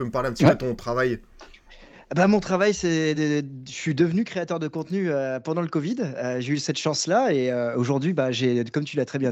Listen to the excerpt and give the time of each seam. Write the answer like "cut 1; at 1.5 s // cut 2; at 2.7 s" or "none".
none